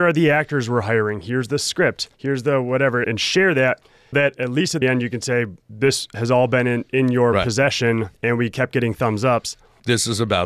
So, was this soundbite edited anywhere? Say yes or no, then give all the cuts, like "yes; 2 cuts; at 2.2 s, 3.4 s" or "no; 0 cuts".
yes; 6 cuts; at 2.1 s, 3.0 s, 4.1 s, 4.8 s, 5.6 s, 8.1 s